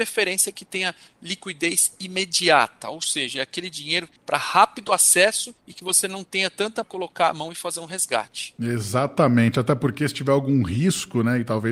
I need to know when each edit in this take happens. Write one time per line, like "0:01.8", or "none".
0:04.2
0:05.6
0:06.8